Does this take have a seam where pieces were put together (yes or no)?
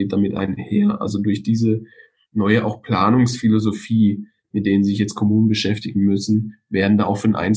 no